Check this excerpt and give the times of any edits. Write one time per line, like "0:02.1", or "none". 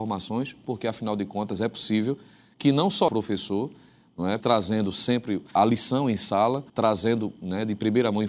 0:03.1
0:04.4
0:05.6
0:06.7